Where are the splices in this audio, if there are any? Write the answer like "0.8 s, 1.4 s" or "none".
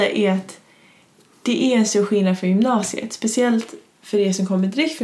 none